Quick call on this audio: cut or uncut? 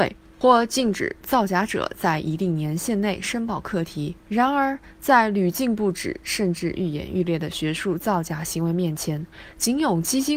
cut